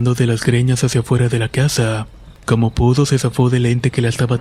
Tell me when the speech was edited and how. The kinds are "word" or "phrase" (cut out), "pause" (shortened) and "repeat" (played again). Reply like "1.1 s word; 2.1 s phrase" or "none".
2.3 s pause